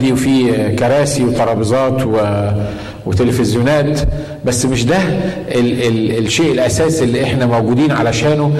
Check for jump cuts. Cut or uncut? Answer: uncut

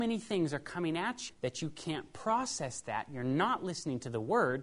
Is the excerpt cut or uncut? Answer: cut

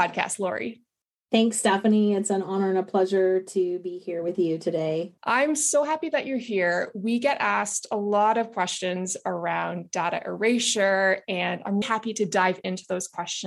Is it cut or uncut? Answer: cut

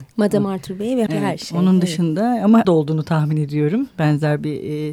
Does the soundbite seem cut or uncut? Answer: cut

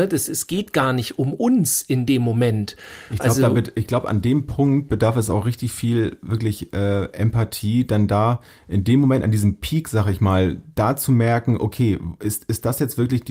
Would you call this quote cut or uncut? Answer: uncut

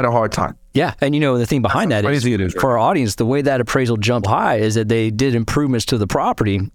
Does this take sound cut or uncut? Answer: cut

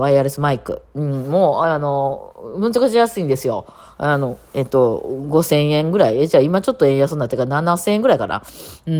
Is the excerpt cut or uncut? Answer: uncut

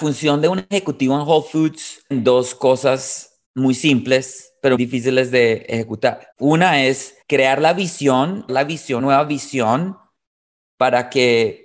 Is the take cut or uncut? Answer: cut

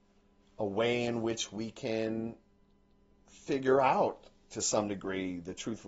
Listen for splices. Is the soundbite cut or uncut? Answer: uncut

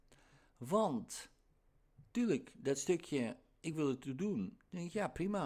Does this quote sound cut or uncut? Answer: uncut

